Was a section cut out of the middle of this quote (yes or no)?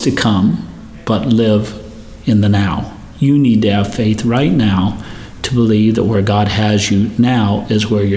no